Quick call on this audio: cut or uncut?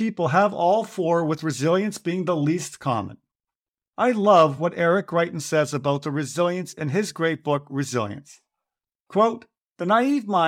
uncut